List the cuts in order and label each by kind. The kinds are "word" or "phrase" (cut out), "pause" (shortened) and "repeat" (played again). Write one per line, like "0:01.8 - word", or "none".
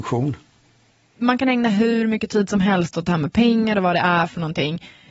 none